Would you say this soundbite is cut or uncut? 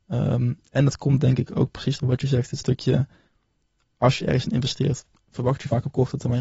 uncut